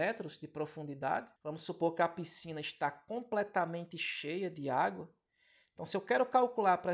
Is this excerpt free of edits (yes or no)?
no